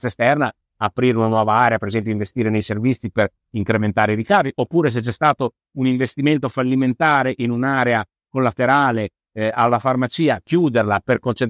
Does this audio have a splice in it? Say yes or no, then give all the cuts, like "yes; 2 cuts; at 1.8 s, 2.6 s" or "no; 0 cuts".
no; 0 cuts